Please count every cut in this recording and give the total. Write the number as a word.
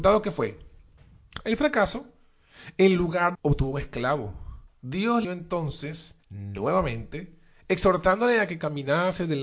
three